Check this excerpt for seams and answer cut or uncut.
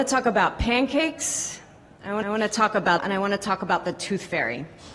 cut